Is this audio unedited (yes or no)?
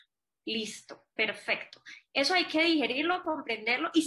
no